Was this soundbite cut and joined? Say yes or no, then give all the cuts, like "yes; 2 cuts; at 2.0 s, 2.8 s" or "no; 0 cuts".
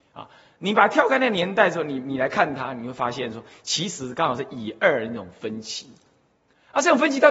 no; 0 cuts